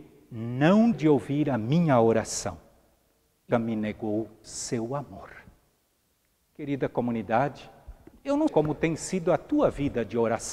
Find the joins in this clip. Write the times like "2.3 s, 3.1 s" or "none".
0.9 s, 3.5 s, 4.4 s, 8.1 s, 8.5 s